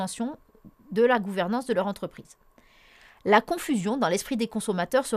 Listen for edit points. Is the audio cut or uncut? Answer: uncut